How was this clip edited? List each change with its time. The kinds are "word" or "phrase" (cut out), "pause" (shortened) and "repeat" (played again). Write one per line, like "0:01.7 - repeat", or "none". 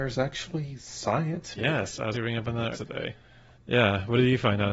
0:01.6 - word
0:02.1 - word
0:02.7 - word